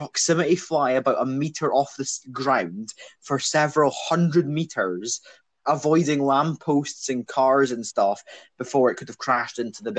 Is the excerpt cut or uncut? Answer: uncut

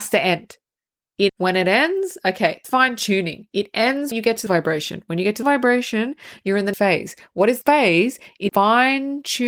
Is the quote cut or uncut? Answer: cut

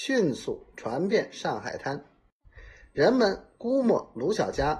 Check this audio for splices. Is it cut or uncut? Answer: uncut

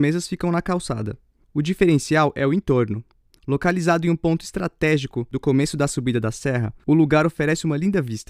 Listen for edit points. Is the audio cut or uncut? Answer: cut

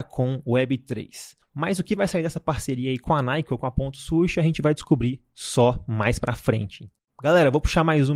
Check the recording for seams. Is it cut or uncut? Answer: uncut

